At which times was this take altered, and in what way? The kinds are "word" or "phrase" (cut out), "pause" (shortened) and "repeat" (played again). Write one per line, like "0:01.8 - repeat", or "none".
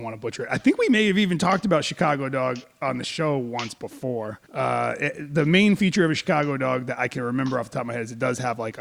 0:04.5 - pause

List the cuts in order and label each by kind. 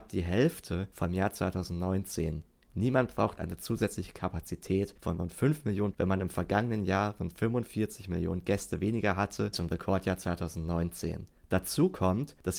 0:03.4 - word
0:05.9 - word
0:09.5 - word

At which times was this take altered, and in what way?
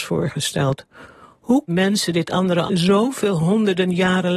0:01.7 - word
0:02.7 - word

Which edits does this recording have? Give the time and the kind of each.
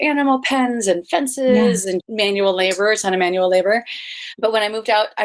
0:02.0 - word

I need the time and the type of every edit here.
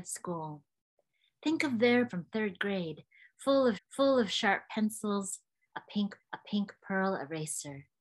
0:02.1 - phrase
0:03.7 - repeat
0:06.2 - repeat

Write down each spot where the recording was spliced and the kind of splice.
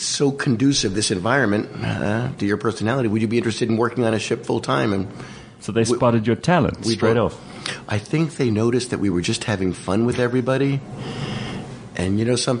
none

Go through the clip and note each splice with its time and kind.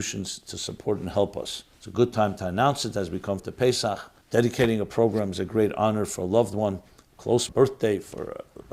0:01.7 - pause
0:03.4 - phrase
0:04.2 - pause
0:07.5 - phrase

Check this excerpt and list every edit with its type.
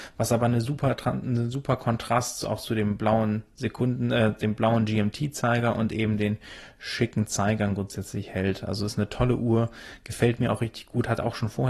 none

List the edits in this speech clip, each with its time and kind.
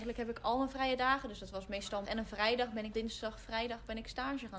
0:02.0 - word
0:02.9 - word

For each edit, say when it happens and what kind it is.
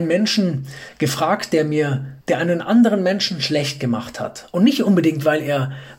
0:02.2 - pause

